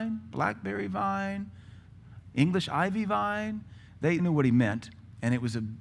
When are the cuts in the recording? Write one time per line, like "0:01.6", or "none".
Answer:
0:04.2